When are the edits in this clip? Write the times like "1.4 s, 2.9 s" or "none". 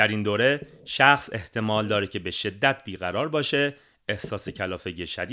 none